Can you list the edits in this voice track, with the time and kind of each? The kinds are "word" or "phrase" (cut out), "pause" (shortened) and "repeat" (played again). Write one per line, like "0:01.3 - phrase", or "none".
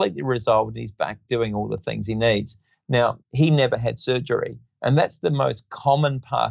0:03.2 - pause

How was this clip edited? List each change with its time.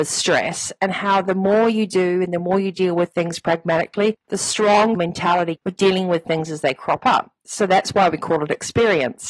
0:04.9 - word
0:05.6 - word

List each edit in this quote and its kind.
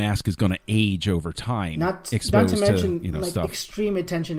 none

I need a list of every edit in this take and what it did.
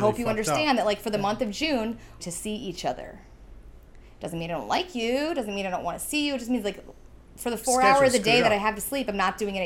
0:02.2 - phrase
0:07.2 - pause

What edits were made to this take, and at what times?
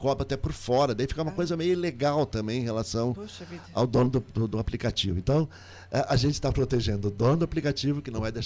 none

